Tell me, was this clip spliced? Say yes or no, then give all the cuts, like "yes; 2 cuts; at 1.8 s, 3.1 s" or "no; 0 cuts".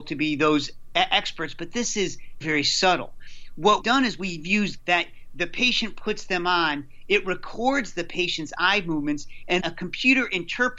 yes; 4 cuts; at 2.4 s, 3.8 s, 4.8 s, 9.6 s